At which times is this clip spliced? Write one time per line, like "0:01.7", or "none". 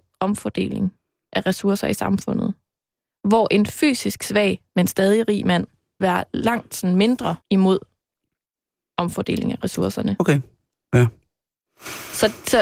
0:06.0
0:07.4

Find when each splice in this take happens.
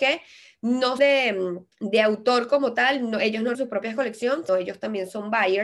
0:01.0
0:01.7
0:03.5
0:04.5

